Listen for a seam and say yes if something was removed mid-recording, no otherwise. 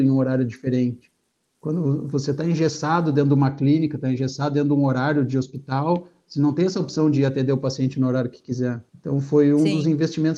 yes